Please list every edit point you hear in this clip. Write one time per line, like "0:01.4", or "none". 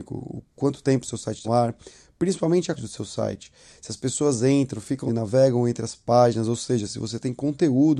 0:01.4
0:02.8
0:05.1